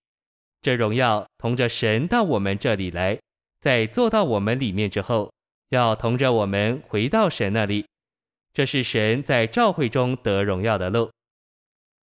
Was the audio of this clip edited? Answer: no; 0 cuts

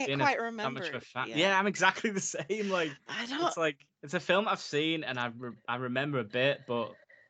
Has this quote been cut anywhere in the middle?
no; 0 cuts

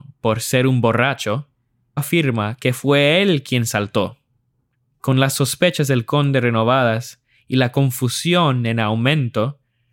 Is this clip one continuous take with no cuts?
no; 1 cut; at 2.0 s

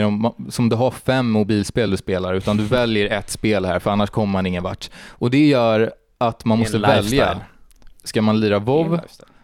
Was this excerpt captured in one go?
yes; 0 cuts

